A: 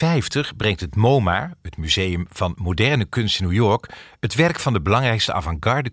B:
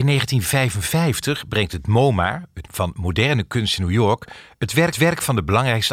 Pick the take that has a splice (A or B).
B